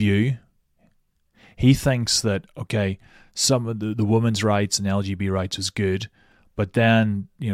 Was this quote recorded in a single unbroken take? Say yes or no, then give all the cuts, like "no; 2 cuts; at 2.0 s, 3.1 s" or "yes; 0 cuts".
yes; 0 cuts